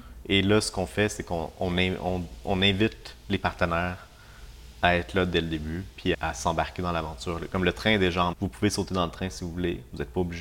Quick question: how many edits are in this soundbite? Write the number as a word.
two